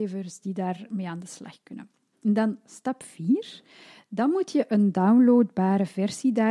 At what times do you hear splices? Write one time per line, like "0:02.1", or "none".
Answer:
none